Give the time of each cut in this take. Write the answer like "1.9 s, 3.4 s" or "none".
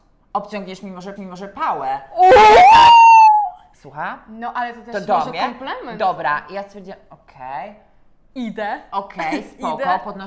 1.2 s, 3.7 s, 8.2 s